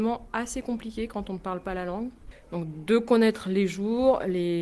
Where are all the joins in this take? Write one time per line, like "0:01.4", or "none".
none